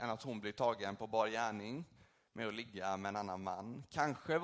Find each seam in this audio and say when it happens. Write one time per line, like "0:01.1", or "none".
none